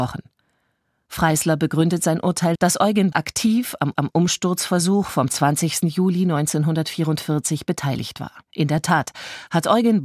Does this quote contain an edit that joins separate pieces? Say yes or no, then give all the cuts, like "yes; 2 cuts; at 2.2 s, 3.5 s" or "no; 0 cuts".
yes; 4 cuts; at 2.6 s, 3.1 s, 4.0 s, 8.5 s